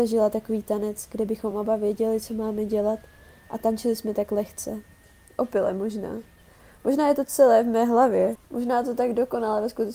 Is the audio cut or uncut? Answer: uncut